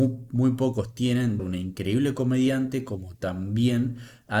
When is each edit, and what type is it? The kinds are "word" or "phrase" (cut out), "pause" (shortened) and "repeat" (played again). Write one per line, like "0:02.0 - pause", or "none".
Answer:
0:01.4 - phrase